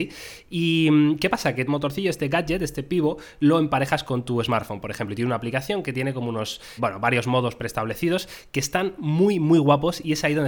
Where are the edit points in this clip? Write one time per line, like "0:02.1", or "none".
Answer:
0:01.7
0:06.8